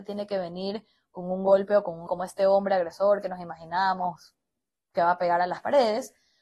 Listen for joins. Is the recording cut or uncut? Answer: cut